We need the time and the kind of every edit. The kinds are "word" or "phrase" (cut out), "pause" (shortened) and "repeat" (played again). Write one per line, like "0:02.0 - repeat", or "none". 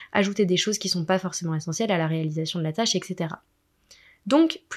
none